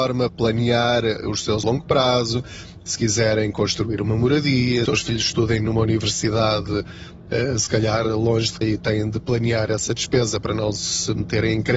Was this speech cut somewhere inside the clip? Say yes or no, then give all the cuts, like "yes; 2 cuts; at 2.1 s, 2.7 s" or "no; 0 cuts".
yes; 3 cuts; at 1.6 s, 4.9 s, 8.6 s